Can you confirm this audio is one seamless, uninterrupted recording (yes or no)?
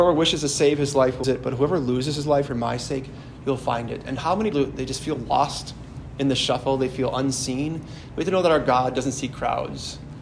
no